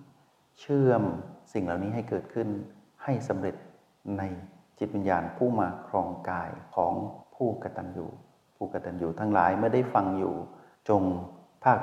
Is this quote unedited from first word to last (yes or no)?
yes